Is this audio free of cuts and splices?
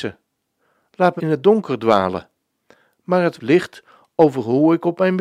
no; 2 cuts; at 1.2 s, 3.4 s

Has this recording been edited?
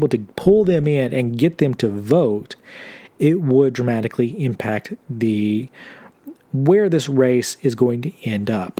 no; 0 cuts

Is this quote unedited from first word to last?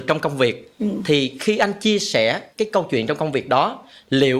no; 1 cut; at 2.5 s

